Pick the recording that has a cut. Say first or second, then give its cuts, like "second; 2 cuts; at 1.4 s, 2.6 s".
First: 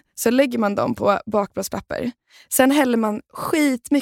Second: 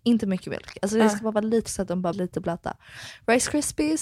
second; 2 cuts; at 1.7 s, 2.1 s